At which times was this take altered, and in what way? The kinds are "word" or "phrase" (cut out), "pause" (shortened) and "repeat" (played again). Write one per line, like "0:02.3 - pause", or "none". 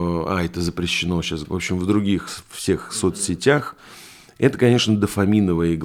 0:01.4 - word